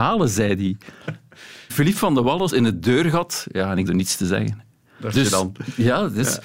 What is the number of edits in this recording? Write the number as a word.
four